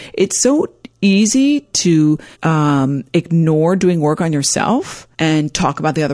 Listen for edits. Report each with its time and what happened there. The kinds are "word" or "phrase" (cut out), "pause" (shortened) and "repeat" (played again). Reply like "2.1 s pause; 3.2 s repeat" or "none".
2.3 s pause; 5.1 s pause